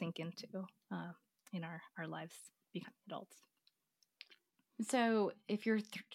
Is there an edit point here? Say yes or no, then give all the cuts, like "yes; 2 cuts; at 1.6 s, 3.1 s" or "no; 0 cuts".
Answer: no; 0 cuts